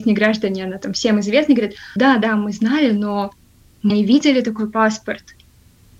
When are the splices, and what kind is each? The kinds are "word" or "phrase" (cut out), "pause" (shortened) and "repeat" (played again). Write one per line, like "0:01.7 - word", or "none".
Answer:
0:02.0 - word
0:03.9 - word